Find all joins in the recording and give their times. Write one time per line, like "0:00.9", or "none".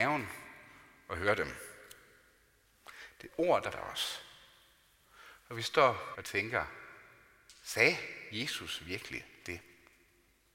0:03.7
0:06.1